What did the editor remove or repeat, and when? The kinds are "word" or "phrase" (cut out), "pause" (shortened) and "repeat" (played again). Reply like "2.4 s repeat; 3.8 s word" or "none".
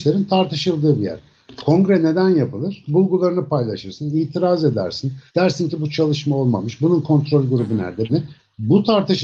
5.3 s pause; 8.1 s word